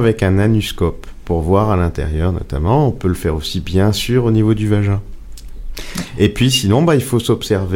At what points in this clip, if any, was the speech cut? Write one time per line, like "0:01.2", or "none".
none